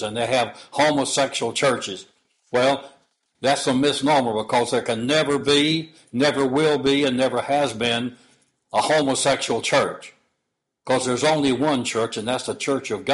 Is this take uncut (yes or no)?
yes